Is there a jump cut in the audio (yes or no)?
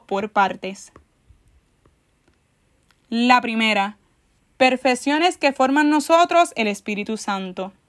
no